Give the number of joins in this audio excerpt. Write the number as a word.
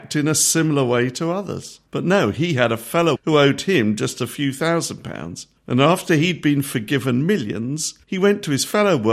four